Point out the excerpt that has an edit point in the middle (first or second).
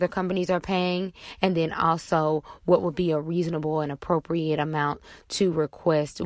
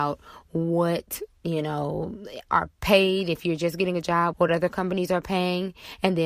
second